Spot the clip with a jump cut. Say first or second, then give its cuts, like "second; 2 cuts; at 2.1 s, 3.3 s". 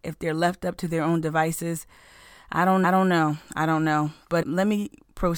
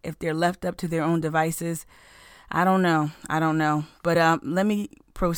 first; 2 cuts; at 2.8 s, 4.4 s